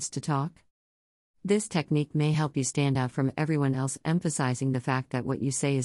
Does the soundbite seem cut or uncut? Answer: uncut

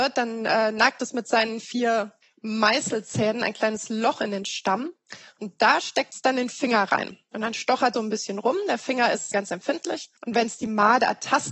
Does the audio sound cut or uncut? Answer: cut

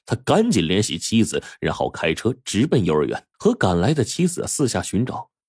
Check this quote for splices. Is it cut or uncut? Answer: cut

